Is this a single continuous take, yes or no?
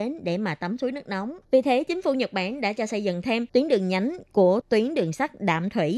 no